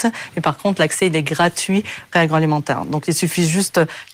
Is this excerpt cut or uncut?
cut